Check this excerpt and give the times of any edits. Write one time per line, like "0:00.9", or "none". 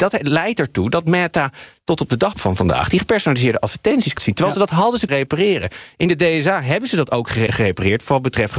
0:02.3
0:04.2
0:05.1
0:07.5